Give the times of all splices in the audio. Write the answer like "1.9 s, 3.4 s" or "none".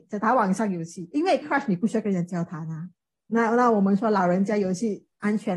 1.4 s